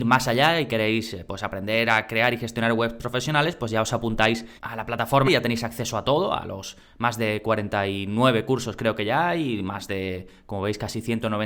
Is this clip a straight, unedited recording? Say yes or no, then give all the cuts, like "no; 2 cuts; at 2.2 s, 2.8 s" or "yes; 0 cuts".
no; 2 cuts; at 4.6 s, 5.2 s